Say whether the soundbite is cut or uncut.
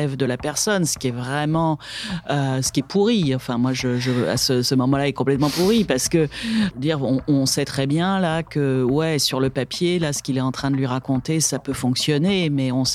uncut